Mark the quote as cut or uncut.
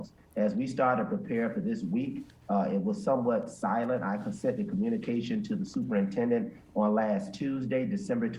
uncut